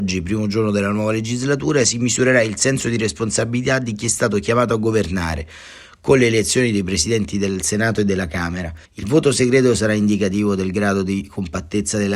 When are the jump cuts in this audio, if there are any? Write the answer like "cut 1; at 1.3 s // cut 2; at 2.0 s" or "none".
cut 1; at 8.9 s

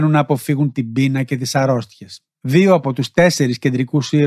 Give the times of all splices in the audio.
cut 1; at 2.3 s

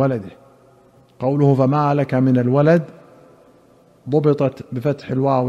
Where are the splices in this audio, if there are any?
none

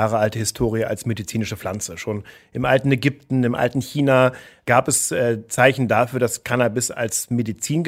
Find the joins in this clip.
none

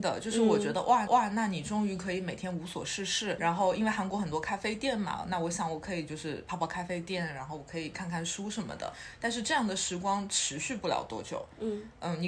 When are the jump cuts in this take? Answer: cut 1; at 1.1 s // cut 2; at 3.4 s

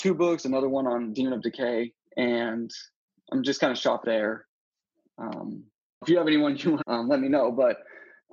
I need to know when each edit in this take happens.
cut 1; at 2.0 s // cut 2; at 4.0 s // cut 3; at 6.0 s // cut 4; at 6.8 s

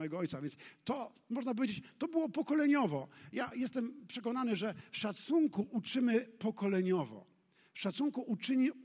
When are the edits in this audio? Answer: cut 1; at 3.5 s

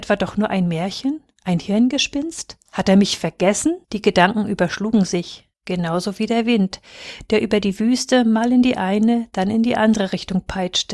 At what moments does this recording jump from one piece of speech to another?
cut 1; at 3.8 s // cut 2; at 5.5 s

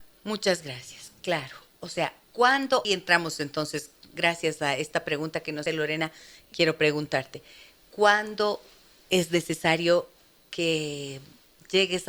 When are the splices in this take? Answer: cut 1; at 2.8 s // cut 2; at 5.7 s

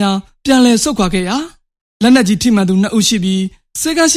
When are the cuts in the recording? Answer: none

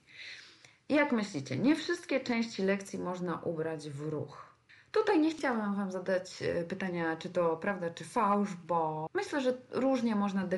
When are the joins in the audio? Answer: cut 1; at 4.7 s

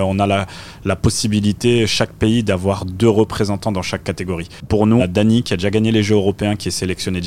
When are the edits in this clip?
cut 1; at 5.0 s

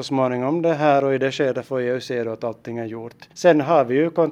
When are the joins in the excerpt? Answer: cut 1; at 3.3 s

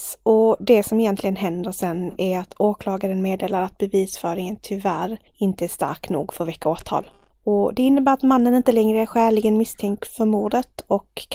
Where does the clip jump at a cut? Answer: cut 1; at 5.3 s // cut 2; at 7.3 s

